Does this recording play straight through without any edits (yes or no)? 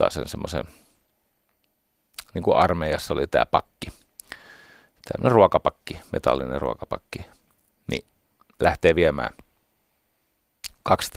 yes